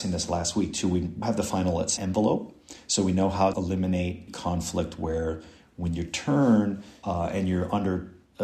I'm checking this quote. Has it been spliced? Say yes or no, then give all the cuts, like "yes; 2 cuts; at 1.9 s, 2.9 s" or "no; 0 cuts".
yes; 4 cuts; at 1.2 s, 2.0 s, 3.5 s, 4.3 s